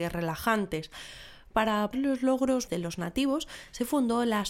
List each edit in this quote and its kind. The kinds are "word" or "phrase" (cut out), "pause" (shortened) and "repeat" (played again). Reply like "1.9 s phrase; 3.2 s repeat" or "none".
1.9 s word; 2.7 s word